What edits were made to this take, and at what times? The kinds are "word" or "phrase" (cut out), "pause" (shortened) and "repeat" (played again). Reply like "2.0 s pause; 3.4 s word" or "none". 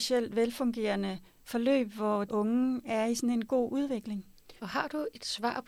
1.3 s pause; 2.3 s word; 4.6 s pause